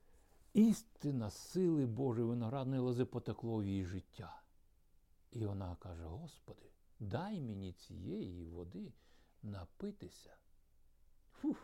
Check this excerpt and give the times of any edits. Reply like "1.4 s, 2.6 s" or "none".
none